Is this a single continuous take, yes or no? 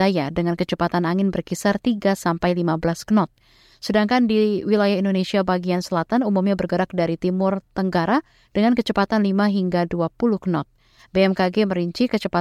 yes